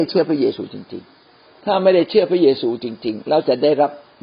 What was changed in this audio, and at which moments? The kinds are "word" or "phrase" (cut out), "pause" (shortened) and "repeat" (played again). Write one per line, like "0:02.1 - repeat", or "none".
0:01.6 - word